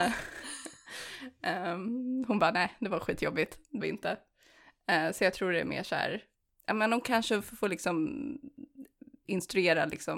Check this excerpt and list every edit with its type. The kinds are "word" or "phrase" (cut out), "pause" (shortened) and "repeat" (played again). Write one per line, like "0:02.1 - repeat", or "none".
0:03.8 - word

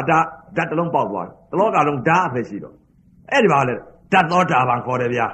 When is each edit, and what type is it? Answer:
none

